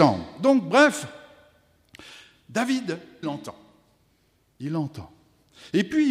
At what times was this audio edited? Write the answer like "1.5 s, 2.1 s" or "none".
3.2 s